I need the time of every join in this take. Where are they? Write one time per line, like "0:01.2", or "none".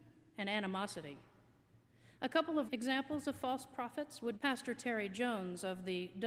0:02.7
0:04.3